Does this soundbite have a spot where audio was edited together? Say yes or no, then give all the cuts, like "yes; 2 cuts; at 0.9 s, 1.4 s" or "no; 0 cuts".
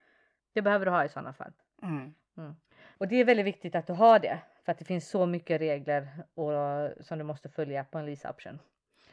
no; 0 cuts